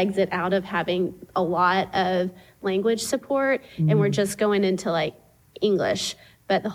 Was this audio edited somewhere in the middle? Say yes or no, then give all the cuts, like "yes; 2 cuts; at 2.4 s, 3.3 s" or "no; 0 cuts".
no; 0 cuts